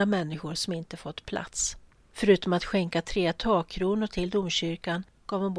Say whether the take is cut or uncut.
uncut